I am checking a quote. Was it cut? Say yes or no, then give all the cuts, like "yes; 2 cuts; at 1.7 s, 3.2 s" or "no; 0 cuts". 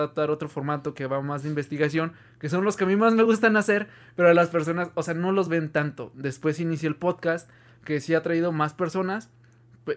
no; 0 cuts